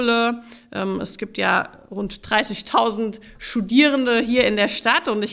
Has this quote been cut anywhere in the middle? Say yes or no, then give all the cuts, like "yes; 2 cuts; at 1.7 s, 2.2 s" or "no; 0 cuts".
no; 0 cuts